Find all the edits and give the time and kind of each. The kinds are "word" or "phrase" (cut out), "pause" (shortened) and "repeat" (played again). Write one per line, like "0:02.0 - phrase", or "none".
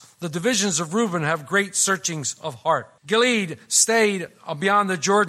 0:03.0 - pause